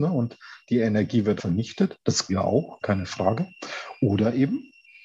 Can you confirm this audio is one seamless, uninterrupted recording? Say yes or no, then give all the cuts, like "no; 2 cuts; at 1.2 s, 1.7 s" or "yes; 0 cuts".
no; 3 cuts; at 1.4 s, 2.3 s, 2.8 s